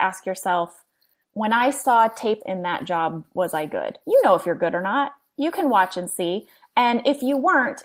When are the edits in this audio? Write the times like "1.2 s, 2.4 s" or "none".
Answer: 1.2 s, 2.4 s, 4.0 s

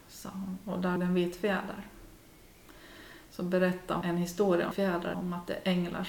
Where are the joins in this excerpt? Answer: 1.0 s, 4.0 s, 4.7 s, 5.1 s

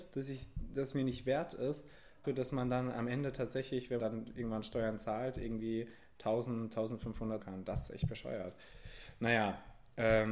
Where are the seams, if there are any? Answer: 2.2 s, 4.0 s, 7.4 s

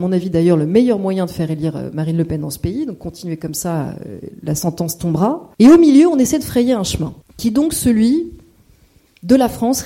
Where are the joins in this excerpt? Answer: none

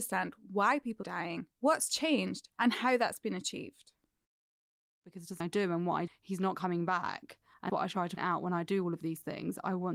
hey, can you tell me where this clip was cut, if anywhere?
1.0 s, 1.5 s, 2.5 s, 4.6 s, 5.4 s, 6.1 s, 7.7 s, 8.2 s

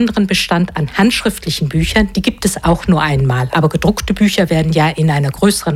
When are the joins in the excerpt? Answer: none

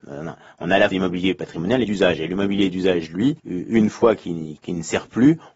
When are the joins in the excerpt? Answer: 0.9 s, 1.8 s, 3.4 s, 4.6 s

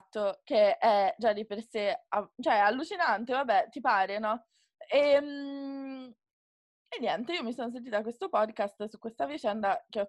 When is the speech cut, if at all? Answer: none

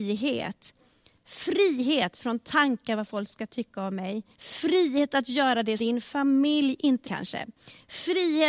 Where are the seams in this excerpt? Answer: 4.3 s, 5.8 s, 7.0 s

